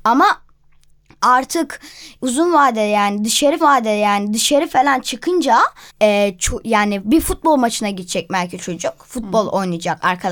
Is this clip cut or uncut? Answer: cut